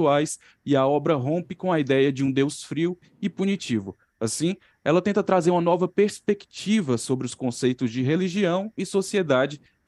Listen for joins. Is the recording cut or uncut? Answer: uncut